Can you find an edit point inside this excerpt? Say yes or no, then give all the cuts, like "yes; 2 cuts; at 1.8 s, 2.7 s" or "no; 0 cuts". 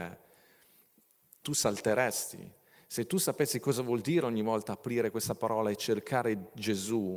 no; 0 cuts